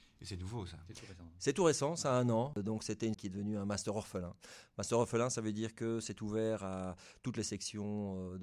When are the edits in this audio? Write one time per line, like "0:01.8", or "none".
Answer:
0:03.1